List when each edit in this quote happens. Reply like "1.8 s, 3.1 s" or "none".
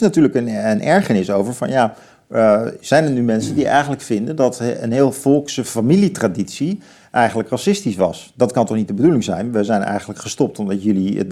none